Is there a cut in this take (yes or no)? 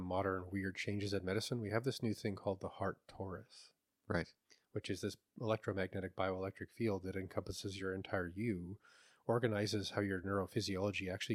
no